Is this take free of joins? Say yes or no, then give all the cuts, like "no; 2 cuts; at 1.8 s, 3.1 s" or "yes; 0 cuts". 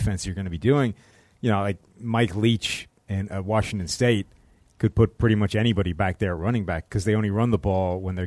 yes; 0 cuts